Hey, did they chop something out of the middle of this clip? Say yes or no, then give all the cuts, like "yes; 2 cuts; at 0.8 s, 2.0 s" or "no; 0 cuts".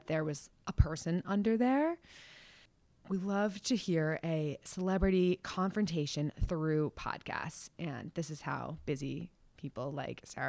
no; 0 cuts